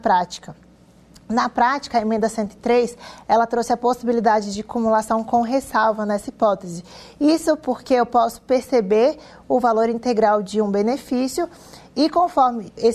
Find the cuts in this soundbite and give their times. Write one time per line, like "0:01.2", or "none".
none